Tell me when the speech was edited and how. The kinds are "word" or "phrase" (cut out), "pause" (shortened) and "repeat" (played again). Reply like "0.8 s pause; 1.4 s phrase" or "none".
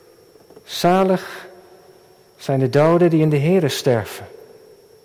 none